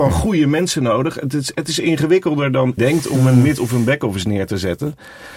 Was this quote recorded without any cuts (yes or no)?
no